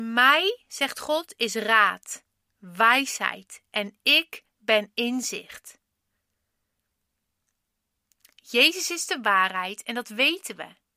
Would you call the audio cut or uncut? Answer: uncut